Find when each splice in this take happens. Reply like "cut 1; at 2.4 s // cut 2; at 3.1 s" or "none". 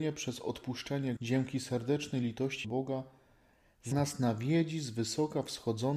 cut 1; at 1.2 s // cut 2; at 2.6 s // cut 3; at 3.9 s